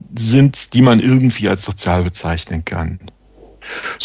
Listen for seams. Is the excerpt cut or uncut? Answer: uncut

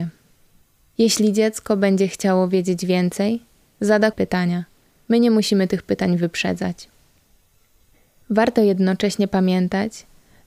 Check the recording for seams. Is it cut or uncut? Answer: cut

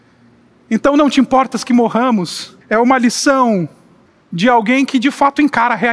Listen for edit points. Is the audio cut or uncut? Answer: cut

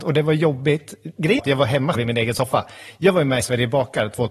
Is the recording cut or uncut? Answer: cut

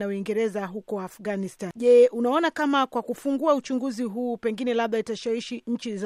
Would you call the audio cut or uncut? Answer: uncut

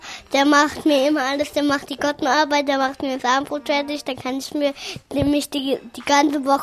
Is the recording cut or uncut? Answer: uncut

